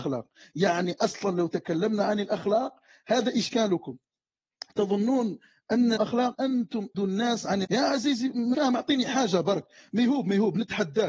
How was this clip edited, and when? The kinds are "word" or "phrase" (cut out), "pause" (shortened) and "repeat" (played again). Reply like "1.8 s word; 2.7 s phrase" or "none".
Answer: 6.0 s word; 6.3 s word; 6.9 s word; 7.6 s word; 8.5 s word